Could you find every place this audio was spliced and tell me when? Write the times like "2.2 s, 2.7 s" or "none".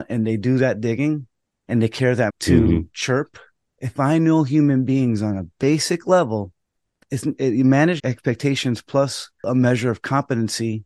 2.3 s, 3.7 s, 8.0 s